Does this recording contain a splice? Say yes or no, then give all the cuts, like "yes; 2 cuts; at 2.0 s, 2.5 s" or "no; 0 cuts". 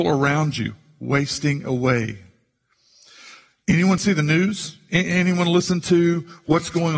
no; 0 cuts